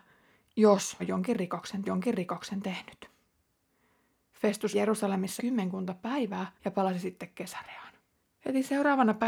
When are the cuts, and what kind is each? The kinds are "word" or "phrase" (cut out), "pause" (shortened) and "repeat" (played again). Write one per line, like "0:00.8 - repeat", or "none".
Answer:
0:01.0 - word
0:01.8 - repeat
0:04.7 - word
0:05.4 - word
0:06.5 - pause
0:08.1 - pause

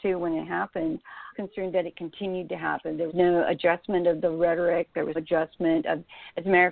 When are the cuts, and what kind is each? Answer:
0:01.3 - phrase
0:03.1 - word
0:05.1 - word

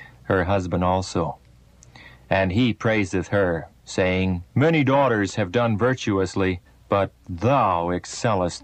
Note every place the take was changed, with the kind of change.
0:04.5 - pause
0:06.6 - pause

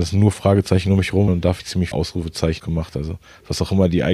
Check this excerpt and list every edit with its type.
0:01.3 - word
0:01.6 - word
0:01.9 - word
0:02.6 - word

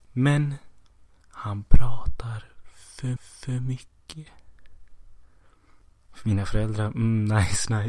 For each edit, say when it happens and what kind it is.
0:03.2 - repeat

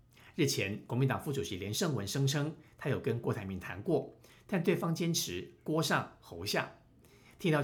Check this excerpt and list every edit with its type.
none

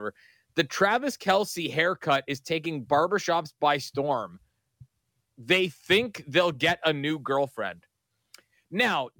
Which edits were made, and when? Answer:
none

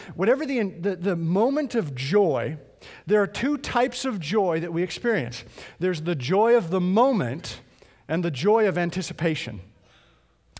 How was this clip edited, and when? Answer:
none

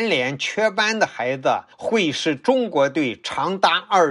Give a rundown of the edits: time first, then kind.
0:01.7 - pause

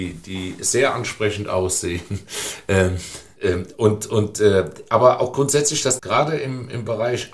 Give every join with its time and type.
0:06.0 - phrase

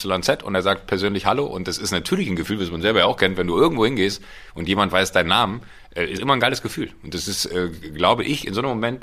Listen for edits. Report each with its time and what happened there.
0:06.2 - word

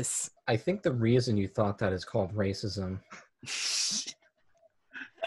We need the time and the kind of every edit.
none

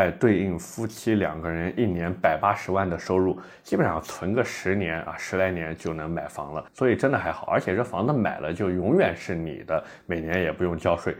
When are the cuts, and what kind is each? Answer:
0:06.7 - pause

